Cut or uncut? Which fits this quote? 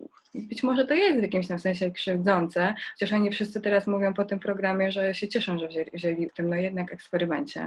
cut